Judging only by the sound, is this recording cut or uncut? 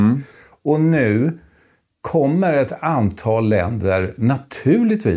uncut